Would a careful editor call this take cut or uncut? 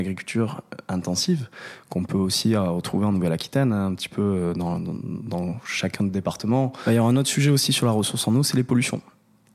uncut